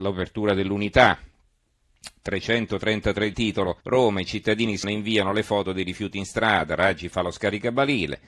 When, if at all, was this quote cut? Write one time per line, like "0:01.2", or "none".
0:03.3
0:03.8
0:04.8